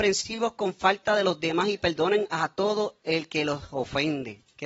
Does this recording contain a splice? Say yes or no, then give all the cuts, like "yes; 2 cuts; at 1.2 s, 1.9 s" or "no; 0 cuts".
no; 0 cuts